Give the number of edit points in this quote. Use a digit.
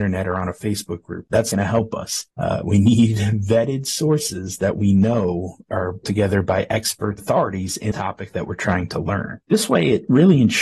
6